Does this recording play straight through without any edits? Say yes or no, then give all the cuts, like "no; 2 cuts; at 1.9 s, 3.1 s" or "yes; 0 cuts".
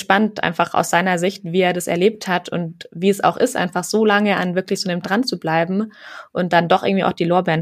no; 1 cut; at 5.0 s